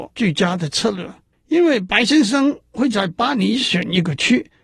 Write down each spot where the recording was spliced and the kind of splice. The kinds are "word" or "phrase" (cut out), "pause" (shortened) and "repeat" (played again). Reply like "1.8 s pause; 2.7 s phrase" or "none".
1.3 s pause